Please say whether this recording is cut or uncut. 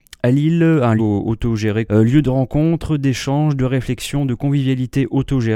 cut